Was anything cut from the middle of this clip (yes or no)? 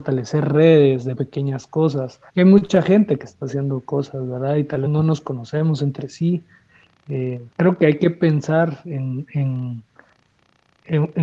yes